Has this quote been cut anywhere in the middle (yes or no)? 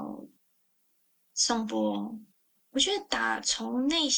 no